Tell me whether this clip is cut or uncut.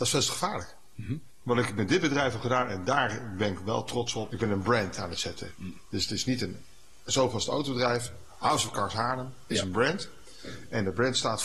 uncut